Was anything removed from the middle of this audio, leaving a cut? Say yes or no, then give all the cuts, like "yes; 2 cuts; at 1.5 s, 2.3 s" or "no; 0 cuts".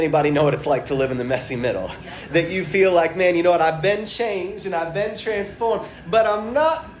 no; 0 cuts